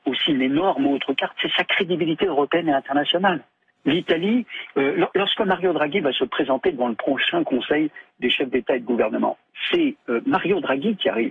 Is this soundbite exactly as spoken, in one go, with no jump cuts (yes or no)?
yes